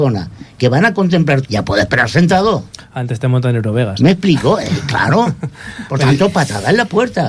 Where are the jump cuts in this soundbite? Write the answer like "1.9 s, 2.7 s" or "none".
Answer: 1.4 s